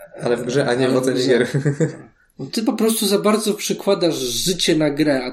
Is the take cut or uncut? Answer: uncut